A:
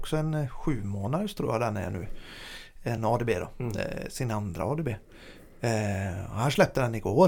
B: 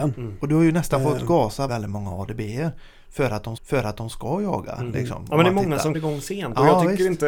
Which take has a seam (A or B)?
B